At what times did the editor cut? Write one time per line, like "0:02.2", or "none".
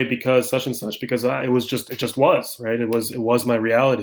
none